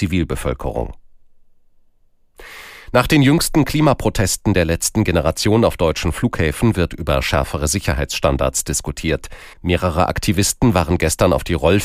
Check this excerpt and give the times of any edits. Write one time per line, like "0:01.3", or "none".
0:09.5